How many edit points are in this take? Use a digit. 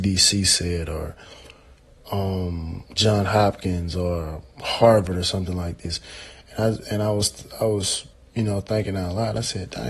2